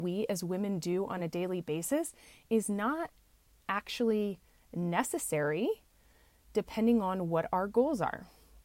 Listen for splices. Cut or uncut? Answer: uncut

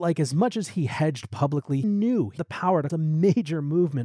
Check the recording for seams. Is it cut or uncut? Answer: cut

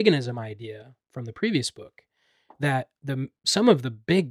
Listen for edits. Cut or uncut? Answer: uncut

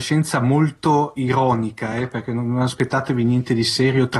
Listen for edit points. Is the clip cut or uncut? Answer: uncut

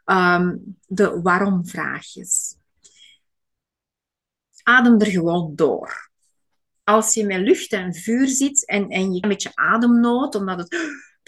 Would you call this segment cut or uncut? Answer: cut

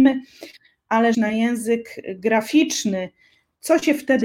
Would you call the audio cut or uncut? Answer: cut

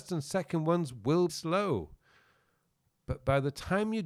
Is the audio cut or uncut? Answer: cut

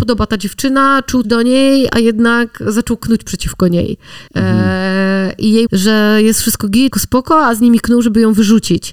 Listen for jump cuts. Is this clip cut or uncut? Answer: cut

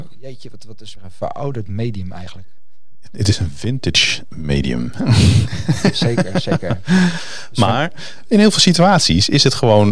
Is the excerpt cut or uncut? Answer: cut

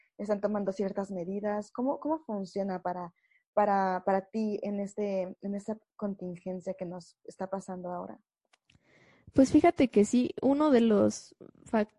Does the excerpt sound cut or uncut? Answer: uncut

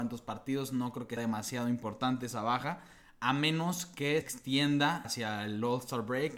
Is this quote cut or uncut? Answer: cut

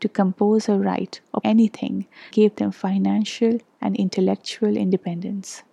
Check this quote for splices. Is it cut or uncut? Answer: cut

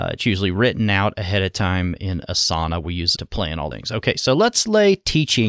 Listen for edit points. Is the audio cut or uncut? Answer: cut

